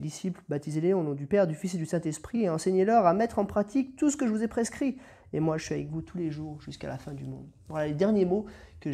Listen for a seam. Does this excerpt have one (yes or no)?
no